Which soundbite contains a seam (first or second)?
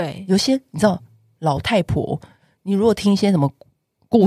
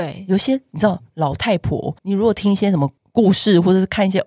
second